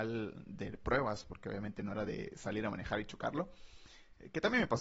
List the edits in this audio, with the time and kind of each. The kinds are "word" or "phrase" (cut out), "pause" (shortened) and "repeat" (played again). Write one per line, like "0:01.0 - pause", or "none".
none